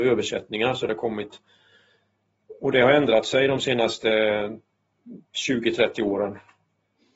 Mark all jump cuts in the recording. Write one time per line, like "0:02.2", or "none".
none